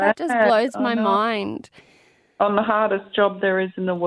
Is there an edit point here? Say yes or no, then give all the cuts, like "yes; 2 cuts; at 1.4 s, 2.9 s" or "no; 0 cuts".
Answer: no; 0 cuts